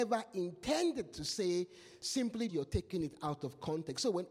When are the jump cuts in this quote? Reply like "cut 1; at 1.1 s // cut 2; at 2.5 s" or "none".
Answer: cut 1; at 2.5 s

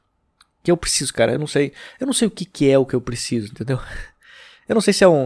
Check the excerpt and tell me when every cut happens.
none

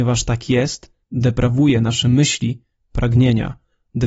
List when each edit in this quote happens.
cut 1; at 1.0 s

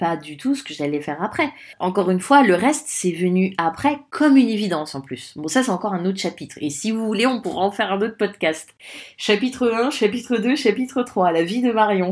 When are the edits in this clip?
none

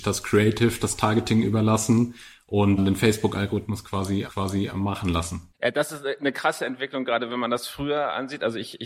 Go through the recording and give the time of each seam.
cut 1; at 2.8 s // cut 2; at 4.3 s // cut 3; at 5.5 s

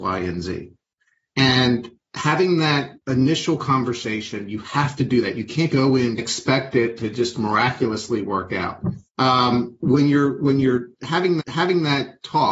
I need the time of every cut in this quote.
cut 1; at 3.0 s // cut 2; at 5.7 s // cut 3; at 6.2 s // cut 4; at 9.1 s // cut 5; at 11.4 s

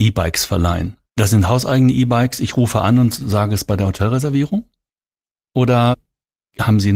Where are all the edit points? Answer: cut 1; at 1.0 s

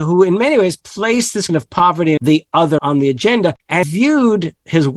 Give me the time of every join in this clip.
cut 1; at 1.5 s // cut 2; at 2.2 s // cut 3; at 2.8 s // cut 4; at 3.8 s

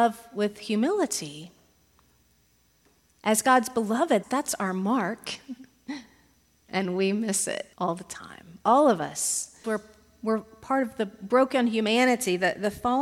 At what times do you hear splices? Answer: cut 1; at 4.2 s // cut 2; at 7.7 s // cut 3; at 9.6 s

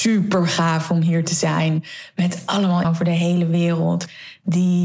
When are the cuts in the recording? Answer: cut 1; at 2.8 s

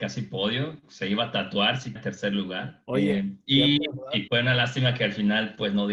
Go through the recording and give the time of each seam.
cut 1; at 2.0 s // cut 2; at 4.3 s

